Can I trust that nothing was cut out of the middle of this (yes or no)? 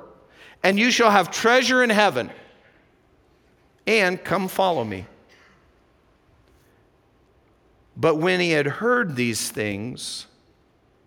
yes